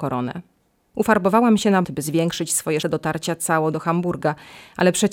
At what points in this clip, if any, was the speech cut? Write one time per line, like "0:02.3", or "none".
0:01.8
0:02.8